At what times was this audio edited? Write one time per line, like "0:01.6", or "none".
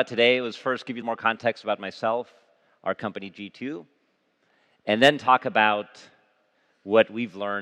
0:01.0